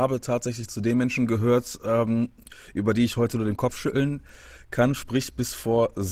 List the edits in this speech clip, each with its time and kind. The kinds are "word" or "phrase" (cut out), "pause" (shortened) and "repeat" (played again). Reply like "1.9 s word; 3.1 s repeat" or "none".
none